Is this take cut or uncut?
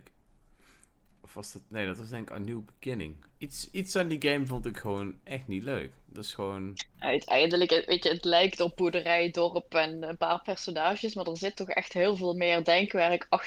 uncut